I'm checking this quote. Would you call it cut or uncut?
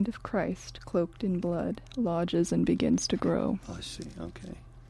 uncut